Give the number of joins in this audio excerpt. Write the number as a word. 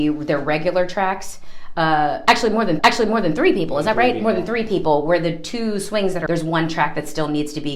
two